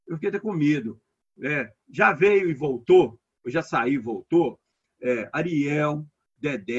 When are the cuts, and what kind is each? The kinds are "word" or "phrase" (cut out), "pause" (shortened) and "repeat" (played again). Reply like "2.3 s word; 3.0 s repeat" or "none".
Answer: none